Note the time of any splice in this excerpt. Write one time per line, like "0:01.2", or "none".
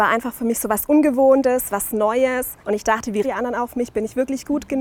0:02.6
0:03.2